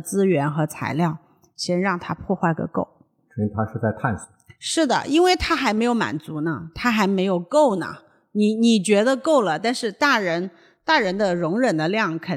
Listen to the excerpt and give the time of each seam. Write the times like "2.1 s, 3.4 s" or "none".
none